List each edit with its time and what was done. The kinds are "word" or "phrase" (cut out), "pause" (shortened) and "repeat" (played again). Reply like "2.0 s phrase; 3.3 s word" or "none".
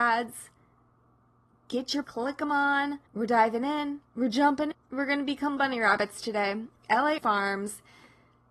2.0 s word; 3.1 s pause; 4.1 s pause; 4.7 s word; 5.6 s word; 7.2 s word